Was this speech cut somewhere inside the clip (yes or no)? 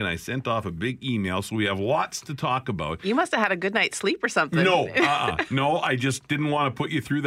no